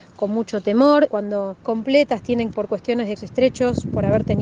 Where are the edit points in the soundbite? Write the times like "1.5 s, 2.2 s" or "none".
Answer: 1.1 s, 1.6 s, 2.5 s, 3.2 s